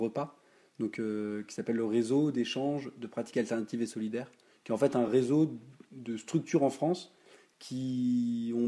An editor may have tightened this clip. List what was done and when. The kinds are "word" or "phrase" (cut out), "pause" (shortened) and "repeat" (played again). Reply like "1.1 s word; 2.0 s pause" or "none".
none